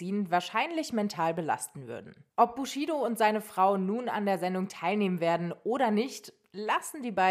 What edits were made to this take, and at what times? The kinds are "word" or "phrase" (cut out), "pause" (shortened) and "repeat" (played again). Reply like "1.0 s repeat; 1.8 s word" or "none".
none